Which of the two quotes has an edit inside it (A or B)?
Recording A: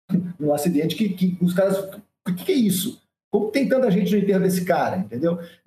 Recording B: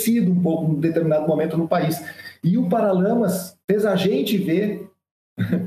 B